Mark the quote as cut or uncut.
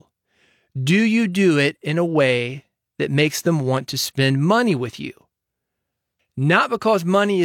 uncut